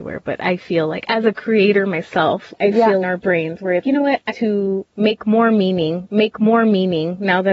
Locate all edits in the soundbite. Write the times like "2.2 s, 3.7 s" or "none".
2.5 s, 3.0 s, 3.8 s, 4.3 s, 6.0 s